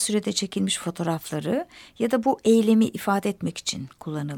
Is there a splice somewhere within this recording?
no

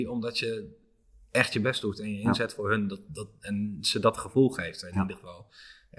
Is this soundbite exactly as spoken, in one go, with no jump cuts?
yes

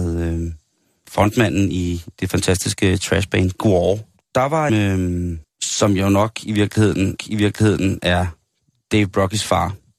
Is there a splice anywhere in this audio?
yes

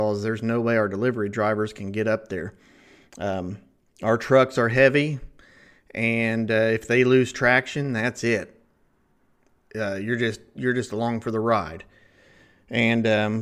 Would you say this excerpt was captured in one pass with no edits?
yes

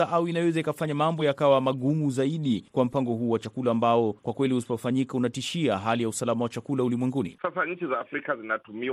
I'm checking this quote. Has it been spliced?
no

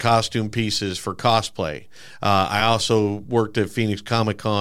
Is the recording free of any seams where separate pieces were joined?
yes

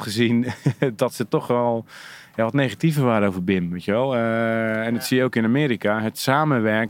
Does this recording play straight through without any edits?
yes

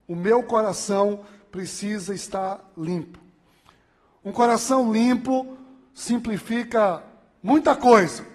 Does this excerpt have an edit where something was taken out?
no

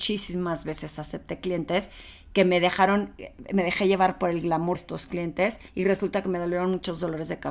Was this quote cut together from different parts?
yes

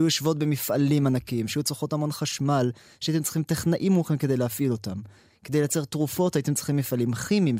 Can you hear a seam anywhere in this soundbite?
no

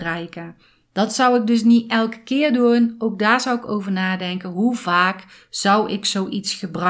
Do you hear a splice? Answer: no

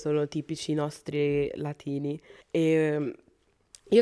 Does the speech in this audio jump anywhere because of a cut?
yes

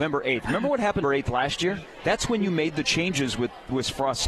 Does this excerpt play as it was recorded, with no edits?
no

